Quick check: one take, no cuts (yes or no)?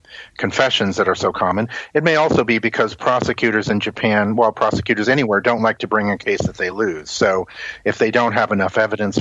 yes